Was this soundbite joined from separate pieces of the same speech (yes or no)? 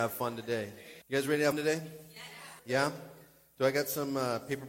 yes